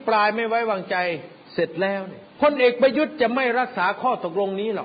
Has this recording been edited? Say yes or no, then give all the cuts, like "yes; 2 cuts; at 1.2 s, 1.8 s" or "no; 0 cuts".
yes; 2 cuts; at 1.4 s, 2.3 s